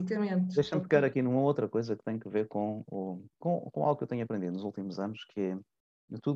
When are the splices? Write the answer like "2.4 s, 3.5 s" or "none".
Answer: 3.3 s